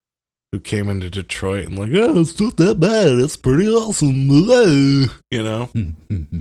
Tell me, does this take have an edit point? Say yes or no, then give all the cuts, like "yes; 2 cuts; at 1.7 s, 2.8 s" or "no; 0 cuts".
no; 0 cuts